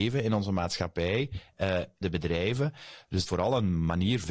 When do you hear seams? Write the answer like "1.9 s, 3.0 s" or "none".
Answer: 2.0 s, 3.3 s